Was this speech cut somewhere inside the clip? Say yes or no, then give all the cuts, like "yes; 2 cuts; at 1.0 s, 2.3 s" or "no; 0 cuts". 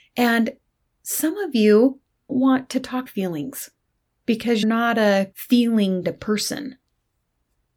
yes; 5 cuts; at 2.3 s, 3.1 s, 4.6 s, 5.3 s, 6.0 s